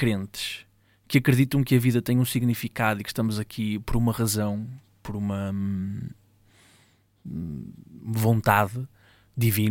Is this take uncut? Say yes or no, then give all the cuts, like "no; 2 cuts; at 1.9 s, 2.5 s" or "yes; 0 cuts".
yes; 0 cuts